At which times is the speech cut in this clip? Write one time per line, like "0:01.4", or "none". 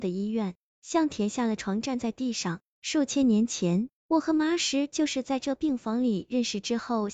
0:04.0